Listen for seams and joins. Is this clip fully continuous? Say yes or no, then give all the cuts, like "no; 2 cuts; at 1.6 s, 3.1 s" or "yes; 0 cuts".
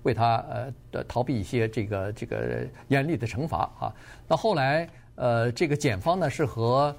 yes; 0 cuts